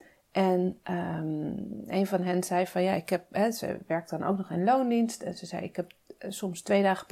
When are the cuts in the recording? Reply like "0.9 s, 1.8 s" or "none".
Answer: none